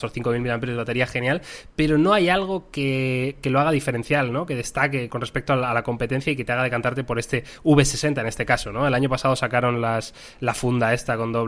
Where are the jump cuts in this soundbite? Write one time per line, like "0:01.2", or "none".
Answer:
0:05.1